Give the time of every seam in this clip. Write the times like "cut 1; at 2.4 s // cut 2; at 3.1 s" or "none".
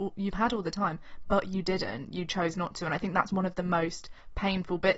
none